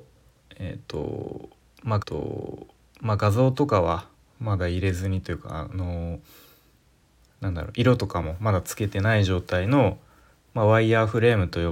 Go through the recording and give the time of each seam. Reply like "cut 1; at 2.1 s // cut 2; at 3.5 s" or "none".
cut 1; at 2.0 s // cut 2; at 4.1 s